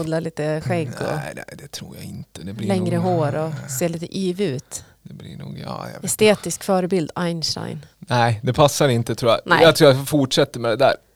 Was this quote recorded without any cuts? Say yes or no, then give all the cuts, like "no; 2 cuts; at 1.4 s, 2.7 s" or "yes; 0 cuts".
no; 1 cut; at 7.9 s